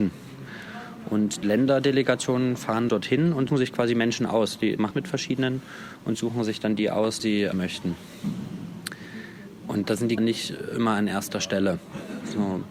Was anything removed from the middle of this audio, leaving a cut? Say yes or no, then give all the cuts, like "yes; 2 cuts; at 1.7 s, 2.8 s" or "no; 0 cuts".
yes; 7 cuts; at 1.4 s, 2.9 s, 3.5 s, 4.9 s, 7.2 s, 7.5 s, 10.2 s